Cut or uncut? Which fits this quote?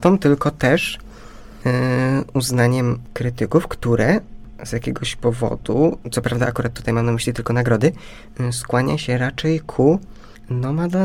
uncut